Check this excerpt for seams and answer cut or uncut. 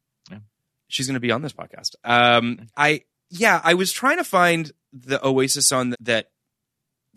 cut